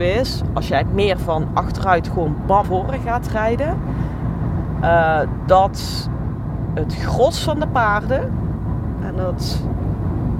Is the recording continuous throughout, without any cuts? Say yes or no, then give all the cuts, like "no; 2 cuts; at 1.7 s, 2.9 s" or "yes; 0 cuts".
no; 1 cut; at 2.6 s